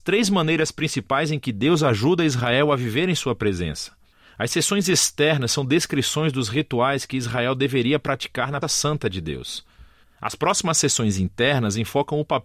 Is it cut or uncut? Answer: cut